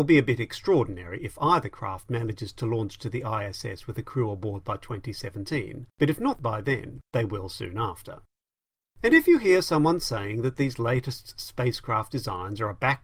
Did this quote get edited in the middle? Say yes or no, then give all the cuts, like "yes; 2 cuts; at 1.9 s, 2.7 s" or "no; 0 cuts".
yes; 3 cuts; at 5.9 s, 7.1 s, 8.6 s